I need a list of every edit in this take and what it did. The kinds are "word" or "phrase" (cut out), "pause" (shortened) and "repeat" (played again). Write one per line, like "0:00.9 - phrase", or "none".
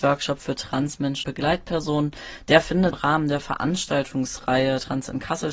0:01.2 - word
0:02.9 - word